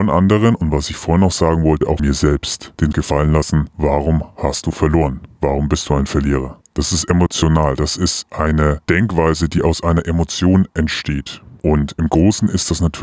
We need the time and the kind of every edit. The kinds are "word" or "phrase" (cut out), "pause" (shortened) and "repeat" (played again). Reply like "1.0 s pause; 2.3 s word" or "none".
2.0 s word; 2.9 s word